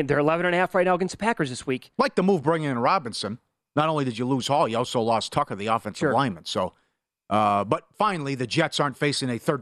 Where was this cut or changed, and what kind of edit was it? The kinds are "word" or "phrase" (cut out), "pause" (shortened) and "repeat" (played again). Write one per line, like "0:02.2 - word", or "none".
none